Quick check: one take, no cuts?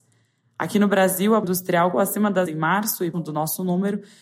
no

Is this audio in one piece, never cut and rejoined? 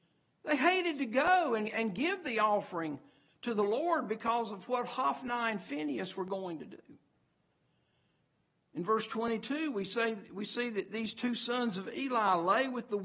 yes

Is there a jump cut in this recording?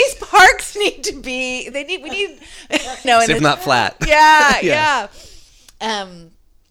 yes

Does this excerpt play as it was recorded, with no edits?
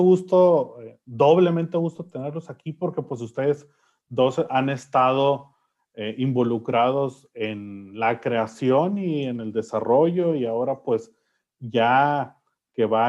yes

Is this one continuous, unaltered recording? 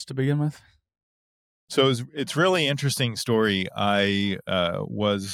yes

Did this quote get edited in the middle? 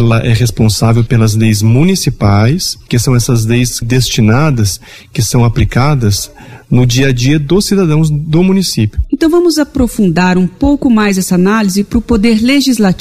yes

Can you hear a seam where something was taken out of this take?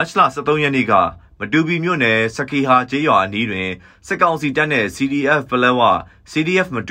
no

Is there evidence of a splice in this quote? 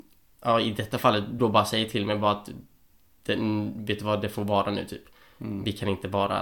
yes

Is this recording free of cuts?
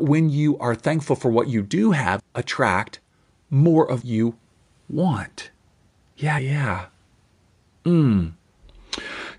no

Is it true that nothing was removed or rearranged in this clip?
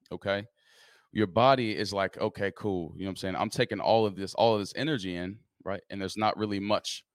yes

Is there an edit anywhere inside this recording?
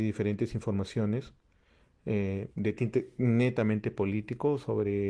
no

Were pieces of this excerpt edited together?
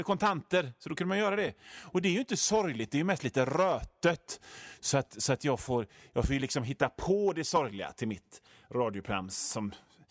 no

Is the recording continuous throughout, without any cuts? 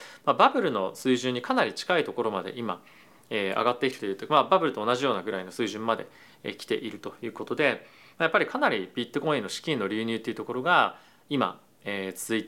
yes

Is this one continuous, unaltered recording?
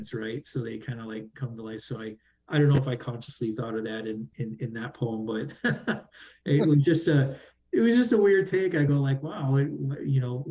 yes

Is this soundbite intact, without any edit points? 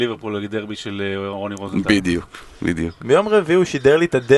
yes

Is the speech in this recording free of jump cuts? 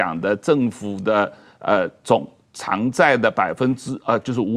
yes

